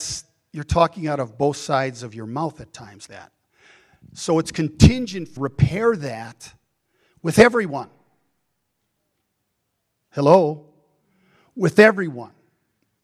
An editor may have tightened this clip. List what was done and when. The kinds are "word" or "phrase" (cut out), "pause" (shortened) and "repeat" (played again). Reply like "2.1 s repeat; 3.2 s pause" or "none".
3.1 s word; 5.4 s phrase